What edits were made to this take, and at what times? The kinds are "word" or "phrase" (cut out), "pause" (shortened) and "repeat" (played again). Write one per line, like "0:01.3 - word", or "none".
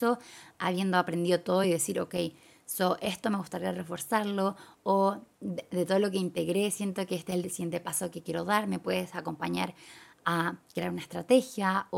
none